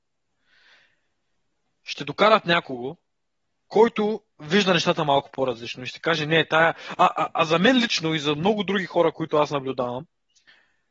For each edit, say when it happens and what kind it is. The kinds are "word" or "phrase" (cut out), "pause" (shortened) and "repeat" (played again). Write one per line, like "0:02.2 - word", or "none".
0:04.3 - pause